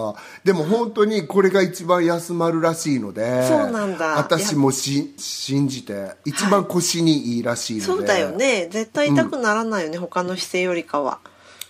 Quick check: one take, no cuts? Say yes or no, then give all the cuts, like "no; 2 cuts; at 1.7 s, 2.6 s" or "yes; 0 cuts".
no; 1 cut; at 5.2 s